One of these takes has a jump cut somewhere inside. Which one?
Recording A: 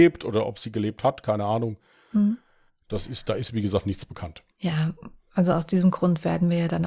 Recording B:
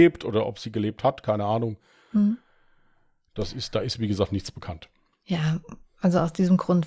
A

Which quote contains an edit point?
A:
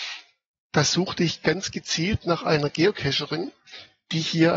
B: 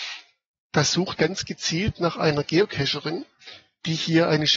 B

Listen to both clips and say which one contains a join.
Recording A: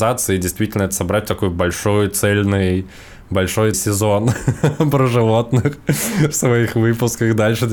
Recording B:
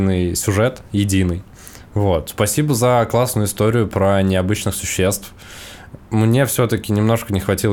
A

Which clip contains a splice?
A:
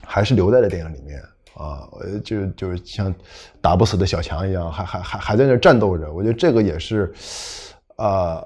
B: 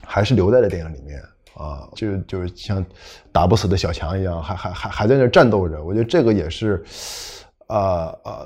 B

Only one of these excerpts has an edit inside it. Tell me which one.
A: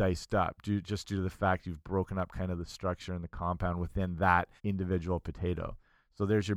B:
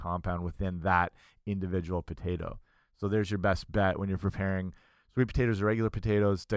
A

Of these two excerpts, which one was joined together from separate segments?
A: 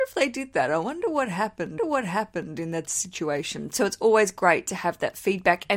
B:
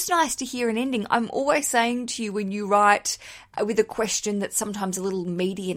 A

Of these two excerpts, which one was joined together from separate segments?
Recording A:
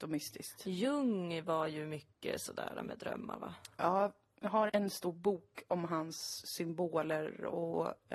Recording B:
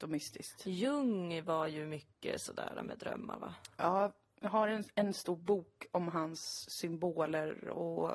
A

